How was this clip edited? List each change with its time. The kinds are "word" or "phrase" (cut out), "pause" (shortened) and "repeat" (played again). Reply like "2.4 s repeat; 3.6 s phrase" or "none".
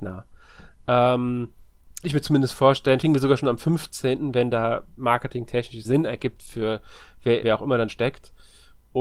2.0 s word; 3.0 s word; 5.0 s word; 5.8 s word; 7.4 s word; 7.9 s word